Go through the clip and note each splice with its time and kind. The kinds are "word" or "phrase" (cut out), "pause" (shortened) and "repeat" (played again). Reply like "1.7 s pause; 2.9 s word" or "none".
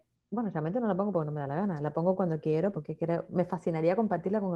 2.7 s word